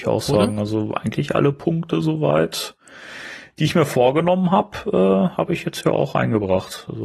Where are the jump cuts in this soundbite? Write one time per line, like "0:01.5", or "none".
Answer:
none